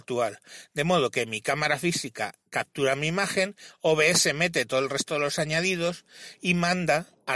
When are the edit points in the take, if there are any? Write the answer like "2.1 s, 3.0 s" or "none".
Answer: none